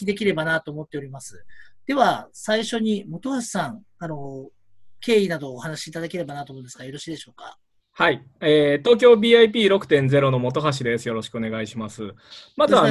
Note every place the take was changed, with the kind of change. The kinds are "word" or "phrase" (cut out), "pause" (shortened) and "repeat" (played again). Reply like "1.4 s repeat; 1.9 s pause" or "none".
none